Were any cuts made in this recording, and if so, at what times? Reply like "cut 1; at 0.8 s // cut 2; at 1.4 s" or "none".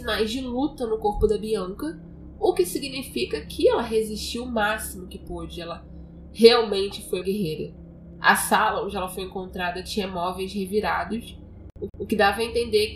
cut 1; at 7.2 s // cut 2; at 11.9 s

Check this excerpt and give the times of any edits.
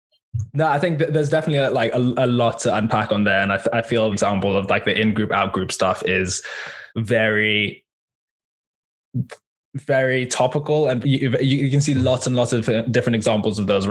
cut 1; at 4.1 s // cut 2; at 6.9 s // cut 3; at 11.0 s

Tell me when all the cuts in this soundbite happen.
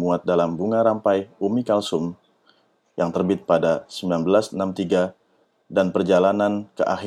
none

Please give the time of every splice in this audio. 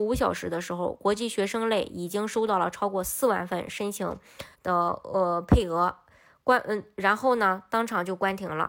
cut 1; at 4.5 s

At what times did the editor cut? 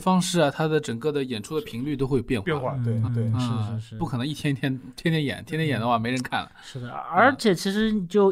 cut 1; at 3.1 s

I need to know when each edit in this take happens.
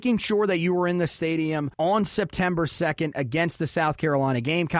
cut 1; at 1.7 s

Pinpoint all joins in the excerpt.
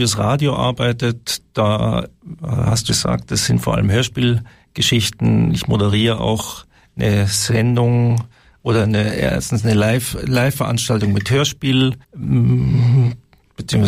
cut 1; at 2.9 s // cut 2; at 12.0 s

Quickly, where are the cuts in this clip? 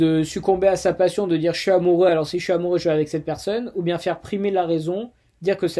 none

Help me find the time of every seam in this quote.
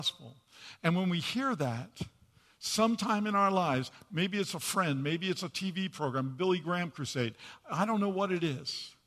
none

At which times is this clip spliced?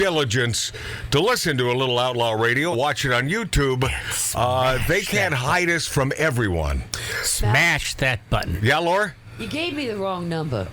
cut 1; at 2.7 s // cut 2; at 8.6 s

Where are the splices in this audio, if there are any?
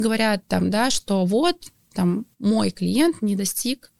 cut 1; at 2.3 s

